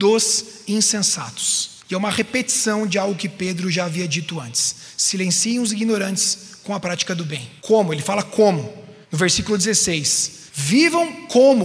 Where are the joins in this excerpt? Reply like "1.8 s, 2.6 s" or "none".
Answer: 1.8 s, 7.6 s, 9.0 s, 10.5 s